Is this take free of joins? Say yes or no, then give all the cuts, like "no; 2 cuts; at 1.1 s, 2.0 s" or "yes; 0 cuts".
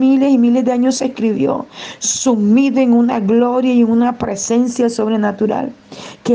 yes; 0 cuts